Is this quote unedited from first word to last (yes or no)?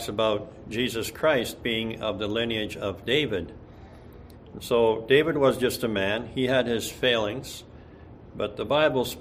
yes